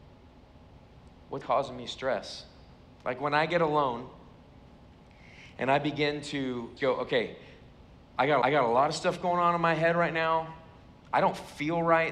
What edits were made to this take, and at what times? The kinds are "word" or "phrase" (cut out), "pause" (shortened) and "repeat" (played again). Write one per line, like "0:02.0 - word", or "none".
0:01.4 - word
0:06.8 - word
0:08.4 - repeat